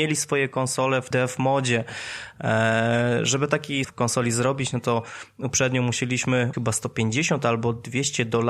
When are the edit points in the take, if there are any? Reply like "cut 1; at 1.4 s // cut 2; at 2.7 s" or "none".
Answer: cut 1; at 1.1 s // cut 2; at 3.8 s // cut 3; at 6.5 s